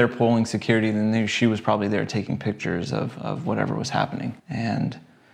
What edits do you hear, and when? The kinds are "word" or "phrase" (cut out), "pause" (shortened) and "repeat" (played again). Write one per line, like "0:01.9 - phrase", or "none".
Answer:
0:04.4 - pause